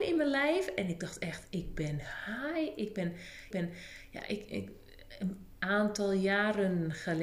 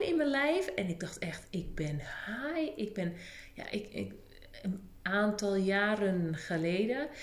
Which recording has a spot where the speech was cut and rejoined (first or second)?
first